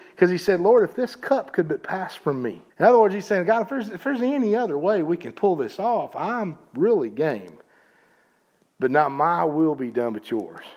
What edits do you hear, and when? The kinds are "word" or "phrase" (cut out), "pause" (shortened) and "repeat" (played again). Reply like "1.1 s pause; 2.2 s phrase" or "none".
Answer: 2.7 s pause